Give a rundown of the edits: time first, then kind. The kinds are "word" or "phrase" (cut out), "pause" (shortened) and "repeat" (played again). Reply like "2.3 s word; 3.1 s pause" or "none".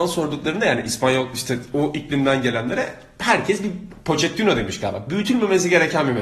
none